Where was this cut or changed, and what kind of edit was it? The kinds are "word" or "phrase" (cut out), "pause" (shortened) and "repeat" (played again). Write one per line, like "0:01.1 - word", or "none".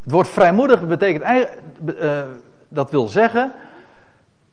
none

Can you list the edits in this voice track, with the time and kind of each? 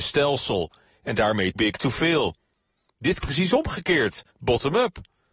0:01.6 - word
0:03.2 - phrase
0:04.3 - pause

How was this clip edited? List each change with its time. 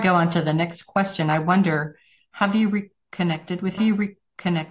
0:03.8 - repeat

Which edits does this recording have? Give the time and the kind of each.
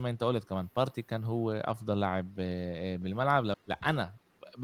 0:03.5 - word

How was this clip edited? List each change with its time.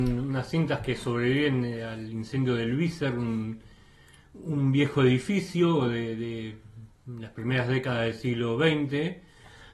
none

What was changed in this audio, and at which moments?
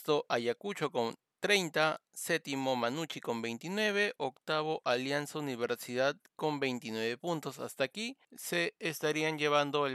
0:08.2 - pause

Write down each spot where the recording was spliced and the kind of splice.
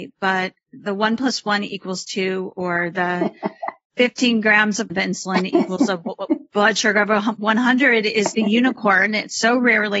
0:04.9 - phrase
0:08.3 - word

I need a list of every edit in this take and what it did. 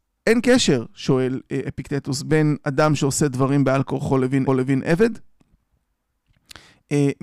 0:04.5 - repeat

